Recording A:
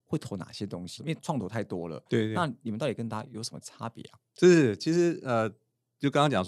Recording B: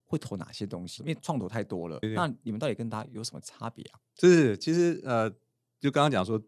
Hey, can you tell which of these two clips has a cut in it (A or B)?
B